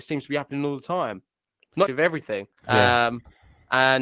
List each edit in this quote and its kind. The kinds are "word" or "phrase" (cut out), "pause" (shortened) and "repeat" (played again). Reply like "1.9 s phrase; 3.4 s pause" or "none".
1.9 s phrase; 2.6 s pause